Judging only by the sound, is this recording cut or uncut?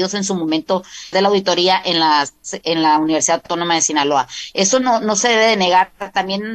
cut